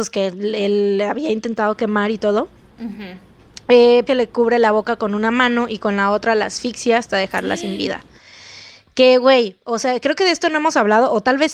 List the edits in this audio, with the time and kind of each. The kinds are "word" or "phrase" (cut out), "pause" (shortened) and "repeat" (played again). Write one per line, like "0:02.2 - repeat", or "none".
0:04.1 - phrase